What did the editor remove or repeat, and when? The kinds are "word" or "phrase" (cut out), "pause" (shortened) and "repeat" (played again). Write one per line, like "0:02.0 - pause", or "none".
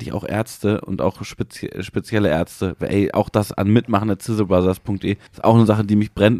0:05.3 - pause